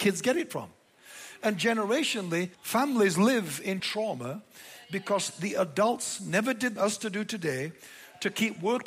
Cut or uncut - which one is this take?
cut